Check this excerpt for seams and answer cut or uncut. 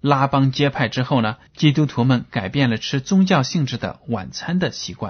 cut